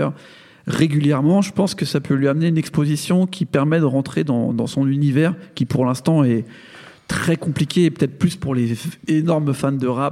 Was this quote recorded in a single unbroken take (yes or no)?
yes